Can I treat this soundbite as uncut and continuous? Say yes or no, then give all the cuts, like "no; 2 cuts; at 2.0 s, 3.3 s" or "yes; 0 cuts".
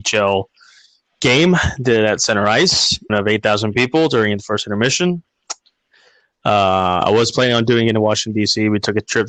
no; 1 cut; at 3.1 s